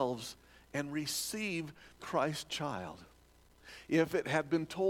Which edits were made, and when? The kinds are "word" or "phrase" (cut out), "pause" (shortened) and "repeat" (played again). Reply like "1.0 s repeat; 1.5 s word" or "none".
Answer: 2.0 s word